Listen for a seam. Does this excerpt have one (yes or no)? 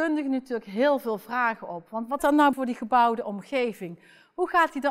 yes